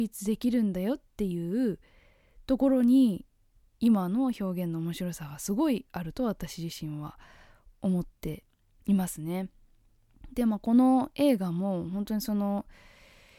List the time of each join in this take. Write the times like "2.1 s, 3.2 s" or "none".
none